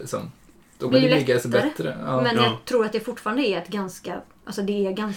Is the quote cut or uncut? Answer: cut